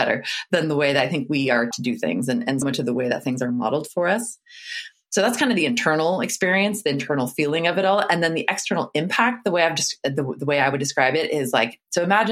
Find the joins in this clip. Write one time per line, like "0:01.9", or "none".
0:01.7
0:02.6